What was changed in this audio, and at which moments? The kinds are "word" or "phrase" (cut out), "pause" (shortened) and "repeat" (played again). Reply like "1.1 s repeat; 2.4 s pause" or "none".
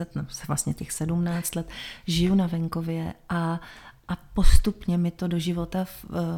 none